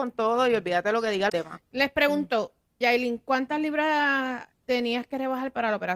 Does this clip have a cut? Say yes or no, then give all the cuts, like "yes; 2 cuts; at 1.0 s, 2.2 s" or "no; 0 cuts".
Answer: yes; 3 cuts; at 1.3 s, 2.8 s, 4.5 s